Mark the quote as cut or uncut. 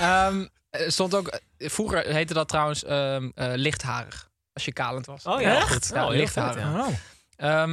uncut